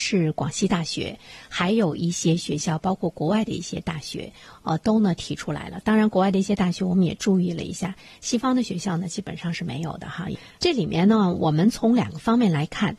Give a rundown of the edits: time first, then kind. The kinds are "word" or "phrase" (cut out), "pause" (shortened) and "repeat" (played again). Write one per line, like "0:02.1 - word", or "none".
none